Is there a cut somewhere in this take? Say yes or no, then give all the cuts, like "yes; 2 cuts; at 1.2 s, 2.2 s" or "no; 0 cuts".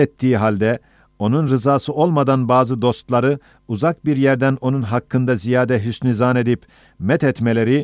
no; 0 cuts